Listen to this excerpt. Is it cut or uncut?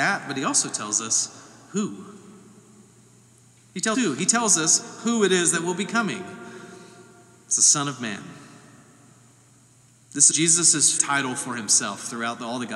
cut